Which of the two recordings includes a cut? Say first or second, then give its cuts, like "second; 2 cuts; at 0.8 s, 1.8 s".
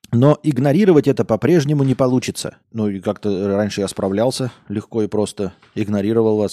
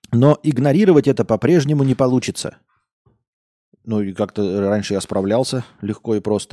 first; 1 cut; at 2.6 s